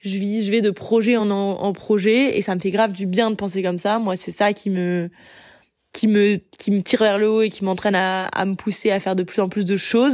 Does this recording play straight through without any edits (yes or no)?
yes